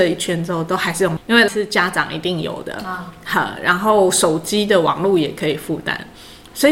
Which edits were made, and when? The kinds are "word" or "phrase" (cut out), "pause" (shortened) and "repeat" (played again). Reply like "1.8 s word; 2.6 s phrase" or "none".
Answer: 1.2 s word; 1.5 s word